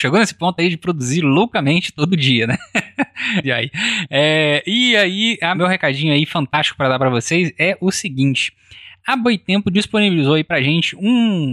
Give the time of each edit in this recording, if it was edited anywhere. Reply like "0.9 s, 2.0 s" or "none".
3.4 s, 5.5 s